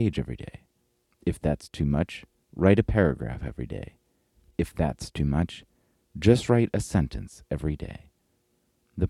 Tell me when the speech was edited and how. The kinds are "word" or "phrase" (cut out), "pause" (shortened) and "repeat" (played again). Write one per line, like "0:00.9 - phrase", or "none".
none